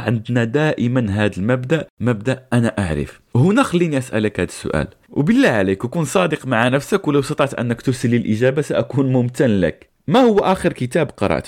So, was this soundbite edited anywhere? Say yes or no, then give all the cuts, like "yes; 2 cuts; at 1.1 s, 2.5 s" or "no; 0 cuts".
no; 0 cuts